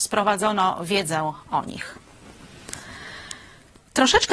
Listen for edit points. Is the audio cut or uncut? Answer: uncut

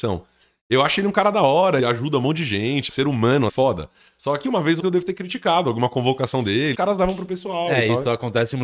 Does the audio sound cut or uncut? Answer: cut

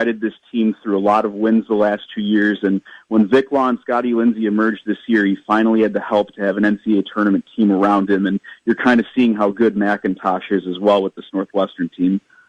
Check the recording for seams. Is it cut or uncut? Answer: uncut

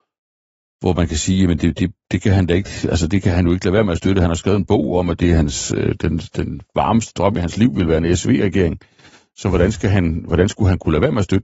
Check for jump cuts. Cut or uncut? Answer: uncut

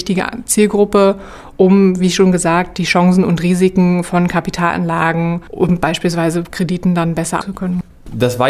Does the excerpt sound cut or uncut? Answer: cut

